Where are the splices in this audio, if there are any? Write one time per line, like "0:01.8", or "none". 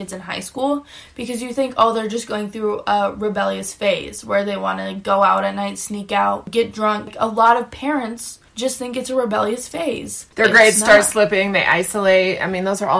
0:08.5
0:10.3